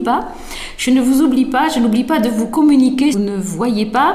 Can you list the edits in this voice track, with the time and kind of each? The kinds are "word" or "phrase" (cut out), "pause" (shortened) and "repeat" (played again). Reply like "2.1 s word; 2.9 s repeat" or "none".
3.1 s phrase

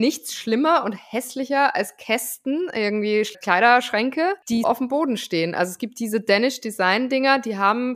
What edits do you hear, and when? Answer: 3.3 s word; 4.6 s word

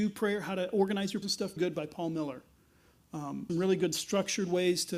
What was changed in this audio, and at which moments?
1.2 s word; 1.6 s phrase; 3.5 s phrase

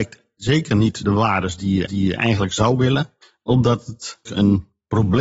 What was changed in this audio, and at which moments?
1.0 s word; 1.9 s repeat; 3.2 s pause; 4.3 s word

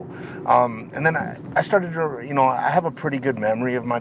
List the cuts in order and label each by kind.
none

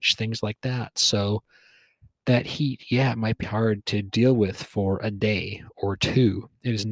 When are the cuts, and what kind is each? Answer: 3.4 s word

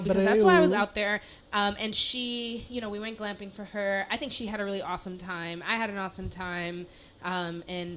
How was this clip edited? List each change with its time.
none

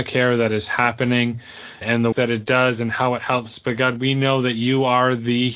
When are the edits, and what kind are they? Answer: 1.8 s word; 2.1 s word

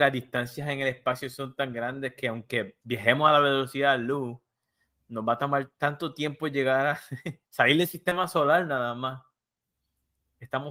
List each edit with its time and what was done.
7.4 s pause

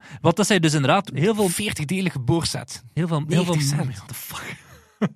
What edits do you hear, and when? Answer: 1.1 s word; 4.1 s word

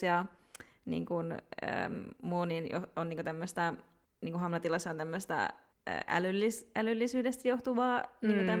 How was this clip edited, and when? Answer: none

